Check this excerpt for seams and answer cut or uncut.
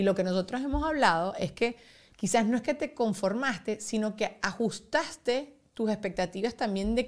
uncut